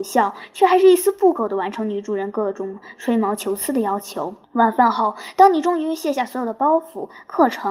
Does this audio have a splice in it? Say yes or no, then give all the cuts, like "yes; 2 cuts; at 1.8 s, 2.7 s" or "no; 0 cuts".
yes; 1 cut; at 4.4 s